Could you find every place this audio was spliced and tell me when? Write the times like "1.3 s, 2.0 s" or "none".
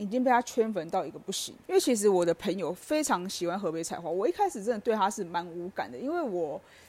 1.6 s